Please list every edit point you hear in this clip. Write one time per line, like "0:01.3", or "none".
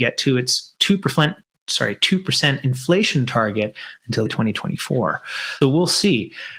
0:04.3
0:05.6